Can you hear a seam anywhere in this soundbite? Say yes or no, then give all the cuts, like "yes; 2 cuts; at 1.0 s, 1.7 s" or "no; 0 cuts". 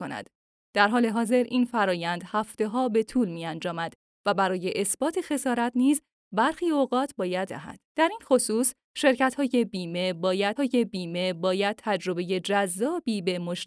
yes; 3 cuts; at 7.5 s, 7.9 s, 10.6 s